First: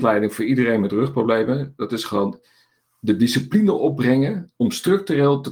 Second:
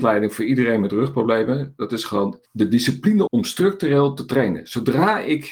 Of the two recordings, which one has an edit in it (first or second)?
second